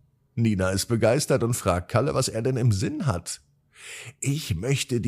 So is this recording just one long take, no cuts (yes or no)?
yes